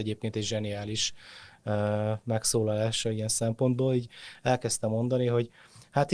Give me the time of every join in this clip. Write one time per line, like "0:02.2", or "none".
none